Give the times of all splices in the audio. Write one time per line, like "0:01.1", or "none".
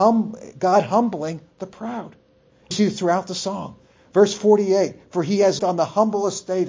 0:02.7
0:05.6